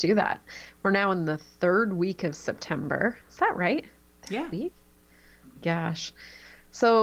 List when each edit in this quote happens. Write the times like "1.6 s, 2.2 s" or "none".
5.6 s